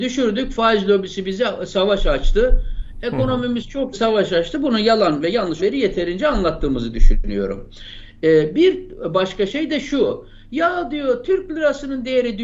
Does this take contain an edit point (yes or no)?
yes